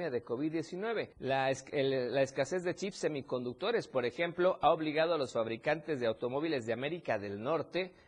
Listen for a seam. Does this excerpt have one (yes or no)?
yes